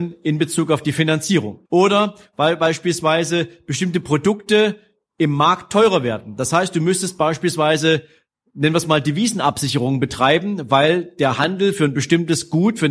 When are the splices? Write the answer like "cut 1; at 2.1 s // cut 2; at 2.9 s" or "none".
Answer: cut 1; at 1.7 s